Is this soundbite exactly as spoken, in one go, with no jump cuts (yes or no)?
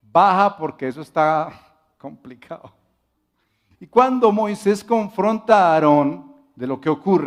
yes